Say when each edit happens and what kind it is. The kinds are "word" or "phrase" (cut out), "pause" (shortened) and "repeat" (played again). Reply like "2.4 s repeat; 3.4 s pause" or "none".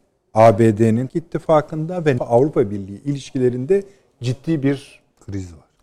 1.1 s word; 2.2 s word